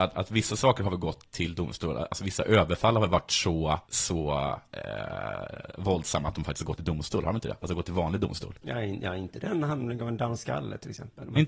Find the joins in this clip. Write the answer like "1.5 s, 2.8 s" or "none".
3.8 s